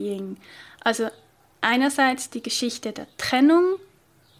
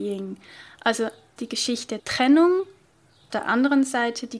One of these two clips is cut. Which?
second; 3 cuts; at 1.4 s, 2.0 s, 3.3 s

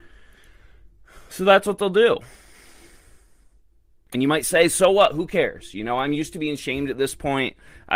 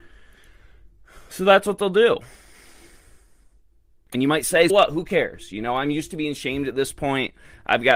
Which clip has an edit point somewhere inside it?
second; 1 cut; at 4.7 s

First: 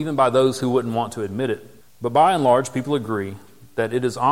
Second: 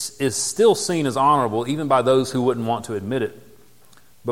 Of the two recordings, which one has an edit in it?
first; 1 cut; at 1.8 s

